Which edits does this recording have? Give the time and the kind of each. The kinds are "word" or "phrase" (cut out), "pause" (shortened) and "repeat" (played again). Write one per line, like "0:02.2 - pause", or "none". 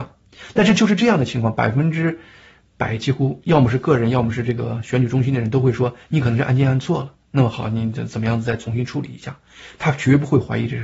none